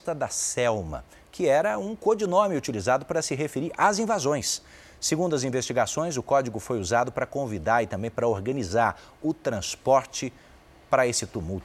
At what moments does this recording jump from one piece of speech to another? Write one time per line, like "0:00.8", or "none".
none